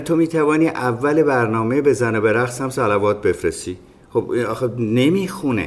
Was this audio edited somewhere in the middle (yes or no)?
no